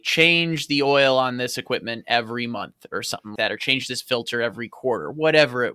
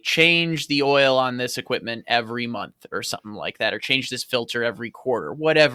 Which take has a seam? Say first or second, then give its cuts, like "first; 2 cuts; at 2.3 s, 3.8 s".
first; 1 cut; at 3.4 s